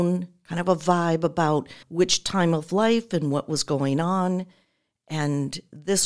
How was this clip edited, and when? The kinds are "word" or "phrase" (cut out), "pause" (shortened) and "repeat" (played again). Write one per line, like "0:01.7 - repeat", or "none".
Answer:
0:01.8 - pause